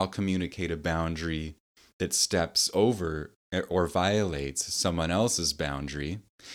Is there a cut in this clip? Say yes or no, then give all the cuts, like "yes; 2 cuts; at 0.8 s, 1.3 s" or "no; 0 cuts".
no; 0 cuts